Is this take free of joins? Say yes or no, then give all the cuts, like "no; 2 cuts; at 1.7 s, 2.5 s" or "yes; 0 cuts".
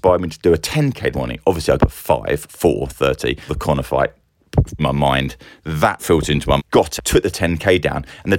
no; 7 cuts; at 1.1 s, 1.8 s, 3.5 s, 4.8 s, 6.0 s, 6.6 s, 7.0 s